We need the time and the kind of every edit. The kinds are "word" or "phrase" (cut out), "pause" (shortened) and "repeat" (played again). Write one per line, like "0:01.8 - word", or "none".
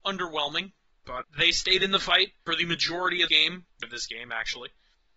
0:01.2 - word
0:02.5 - word
0:03.3 - word
0:03.8 - word